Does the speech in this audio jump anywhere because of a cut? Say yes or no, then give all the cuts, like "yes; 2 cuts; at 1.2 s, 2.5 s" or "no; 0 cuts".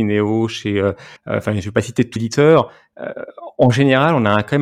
yes; 2 cuts; at 1.2 s, 2.2 s